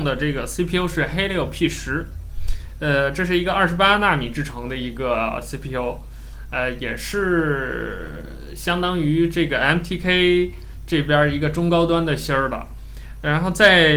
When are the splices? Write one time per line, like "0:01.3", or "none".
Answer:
none